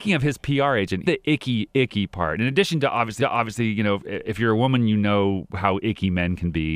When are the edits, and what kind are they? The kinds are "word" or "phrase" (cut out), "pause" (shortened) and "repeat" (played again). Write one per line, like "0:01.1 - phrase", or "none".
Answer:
0:01.0 - word
0:01.7 - word
0:03.2 - repeat